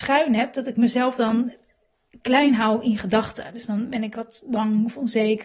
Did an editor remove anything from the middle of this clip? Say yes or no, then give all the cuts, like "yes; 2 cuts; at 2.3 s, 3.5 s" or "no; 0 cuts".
no; 0 cuts